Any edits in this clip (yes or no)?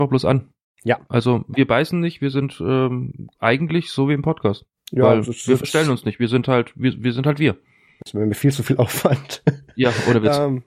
yes